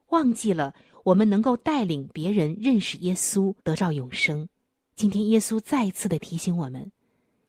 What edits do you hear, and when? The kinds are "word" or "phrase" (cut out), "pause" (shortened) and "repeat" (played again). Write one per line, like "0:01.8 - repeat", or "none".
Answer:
0:03.6 - pause
0:04.7 - pause